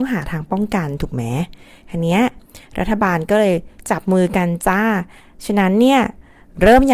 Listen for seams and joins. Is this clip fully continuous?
yes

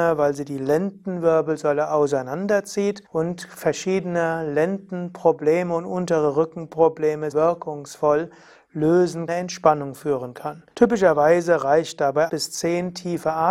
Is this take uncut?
no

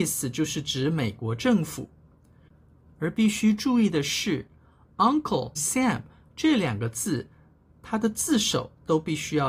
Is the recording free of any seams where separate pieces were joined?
no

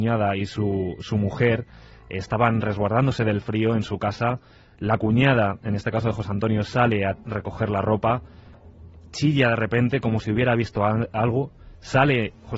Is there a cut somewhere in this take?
no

